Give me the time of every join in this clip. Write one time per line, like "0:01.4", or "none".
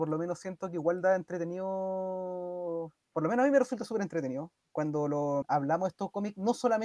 0:05.4